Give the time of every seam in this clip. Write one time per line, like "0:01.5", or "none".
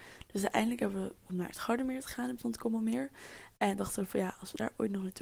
0:01.2
0:02.4